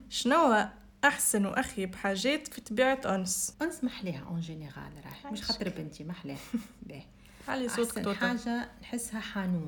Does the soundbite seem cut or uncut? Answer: uncut